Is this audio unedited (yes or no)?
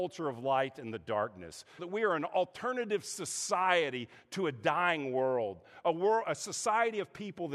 no